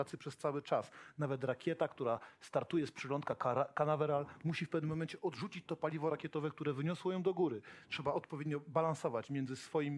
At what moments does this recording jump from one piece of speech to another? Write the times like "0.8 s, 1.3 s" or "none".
none